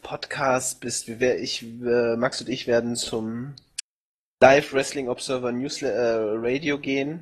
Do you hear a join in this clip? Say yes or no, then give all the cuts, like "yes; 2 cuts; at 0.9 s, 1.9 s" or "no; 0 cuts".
no; 0 cuts